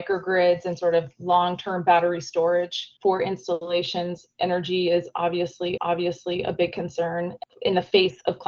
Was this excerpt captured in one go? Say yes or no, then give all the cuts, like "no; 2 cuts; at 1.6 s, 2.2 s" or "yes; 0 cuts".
no; 2 cuts; at 3.0 s, 5.8 s